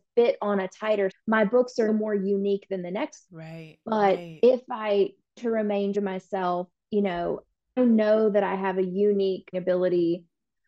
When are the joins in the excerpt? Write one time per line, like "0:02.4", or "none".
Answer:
0:01.1
0:01.9
0:03.3
0:05.4
0:05.9
0:07.8
0:09.5

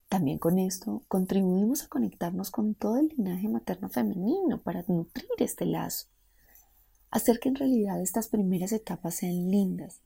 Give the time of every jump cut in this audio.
none

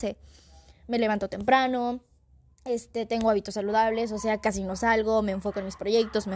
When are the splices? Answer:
none

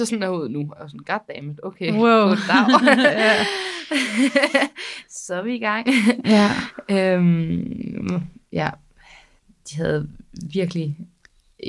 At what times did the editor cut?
none

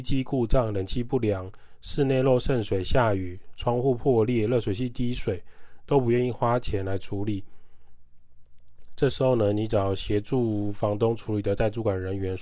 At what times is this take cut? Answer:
none

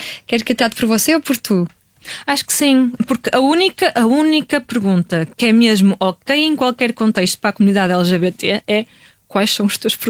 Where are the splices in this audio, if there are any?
0:03.0

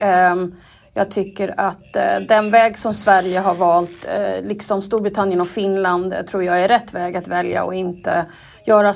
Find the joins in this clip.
none

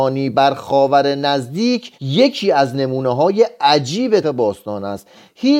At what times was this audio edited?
0:01.9
0:04.2

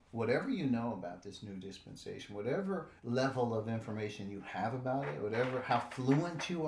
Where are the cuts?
0:03.0

